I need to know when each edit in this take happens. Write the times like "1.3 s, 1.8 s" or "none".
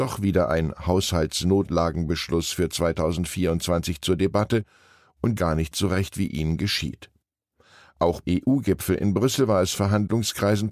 5.4 s, 8.2 s, 9.7 s